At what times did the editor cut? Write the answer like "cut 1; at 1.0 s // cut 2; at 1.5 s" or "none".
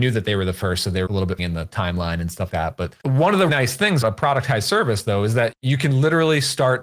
cut 1; at 1.1 s // cut 2; at 1.4 s // cut 3; at 2.5 s // cut 4; at 3.5 s // cut 5; at 4.0 s // cut 6; at 5.5 s